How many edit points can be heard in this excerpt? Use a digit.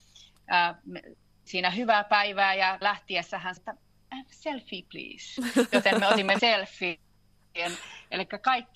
4